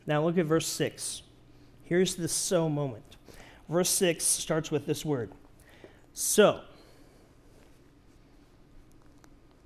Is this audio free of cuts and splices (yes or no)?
yes